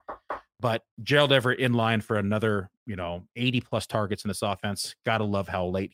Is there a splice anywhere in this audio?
no; 0 cuts

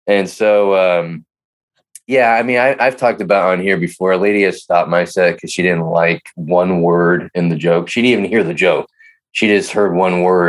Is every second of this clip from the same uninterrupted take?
yes; 0 cuts

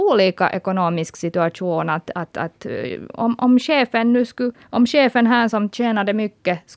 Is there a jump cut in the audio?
yes; 1 cut; at 4.6 s

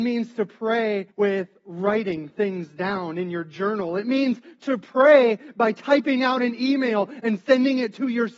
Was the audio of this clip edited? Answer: yes; 1 cut; at 1.1 s

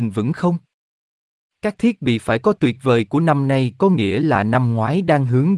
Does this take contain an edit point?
no; 0 cuts

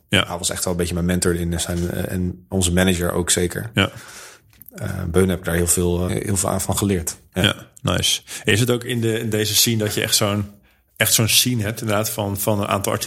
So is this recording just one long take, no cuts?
no; 2 cuts; at 2.5 s, 6.1 s

